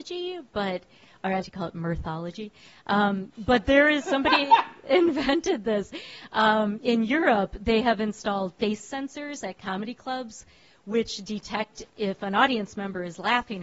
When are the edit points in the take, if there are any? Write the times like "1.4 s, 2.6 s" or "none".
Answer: 1.4 s, 4.0 s